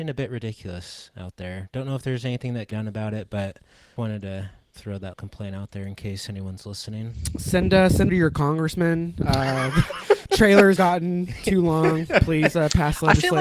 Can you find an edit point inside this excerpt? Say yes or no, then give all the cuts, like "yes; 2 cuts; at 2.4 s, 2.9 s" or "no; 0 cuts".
yes; 5 cuts; at 2.7 s, 4.0 s, 5.1 s, 8.1 s, 10.8 s